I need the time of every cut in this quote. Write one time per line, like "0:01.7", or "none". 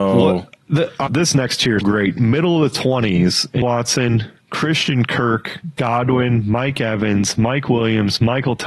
0:01.1
0:01.8
0:03.6

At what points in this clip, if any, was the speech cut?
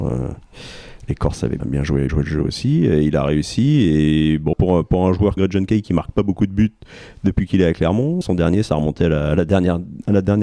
0:01.6
0:02.1
0:04.5
0:05.4
0:08.2

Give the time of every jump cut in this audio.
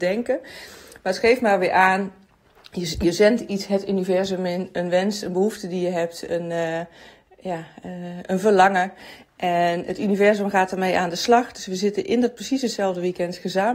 none

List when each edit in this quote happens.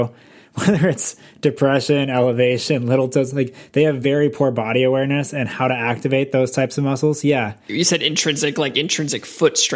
none

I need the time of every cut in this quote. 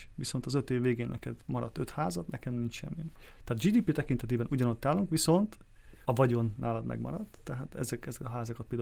none

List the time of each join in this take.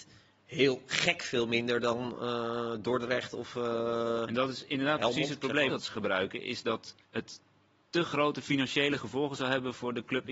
0:05.7
0:07.0

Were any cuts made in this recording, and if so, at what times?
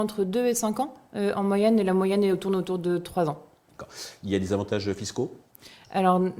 none

